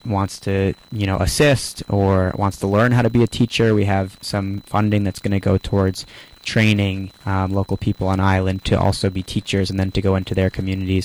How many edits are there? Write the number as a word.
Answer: one